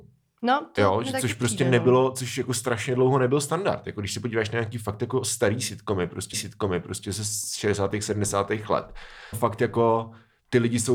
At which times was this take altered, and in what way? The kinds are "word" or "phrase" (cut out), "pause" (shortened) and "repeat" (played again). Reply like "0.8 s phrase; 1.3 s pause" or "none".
6.3 s repeat; 9.3 s phrase